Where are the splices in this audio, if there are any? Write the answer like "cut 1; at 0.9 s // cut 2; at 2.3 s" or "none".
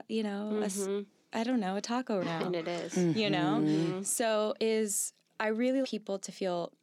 cut 1; at 2.2 s // cut 2; at 4.6 s // cut 3; at 5.8 s